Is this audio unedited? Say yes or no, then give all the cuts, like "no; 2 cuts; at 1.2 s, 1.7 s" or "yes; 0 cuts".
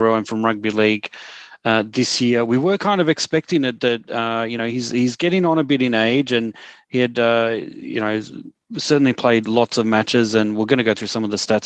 yes; 0 cuts